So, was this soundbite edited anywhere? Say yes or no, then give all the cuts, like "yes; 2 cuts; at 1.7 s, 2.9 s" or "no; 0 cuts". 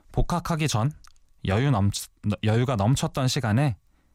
no; 0 cuts